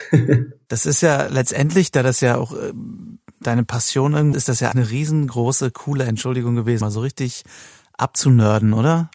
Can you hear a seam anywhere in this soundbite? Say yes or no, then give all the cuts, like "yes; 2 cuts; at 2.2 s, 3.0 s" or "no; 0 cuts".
yes; 3 cuts; at 4.3 s, 4.7 s, 6.8 s